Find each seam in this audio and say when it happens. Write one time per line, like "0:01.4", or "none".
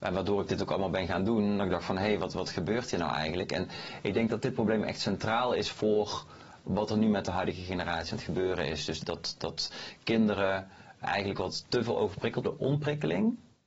0:09.0
0:11.0
0:12.4